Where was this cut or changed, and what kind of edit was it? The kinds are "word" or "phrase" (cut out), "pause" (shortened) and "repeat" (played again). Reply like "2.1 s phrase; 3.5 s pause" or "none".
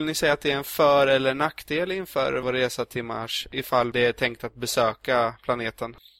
none